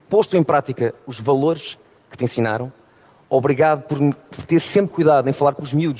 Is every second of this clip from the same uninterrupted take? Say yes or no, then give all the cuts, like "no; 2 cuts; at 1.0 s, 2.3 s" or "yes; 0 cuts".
yes; 0 cuts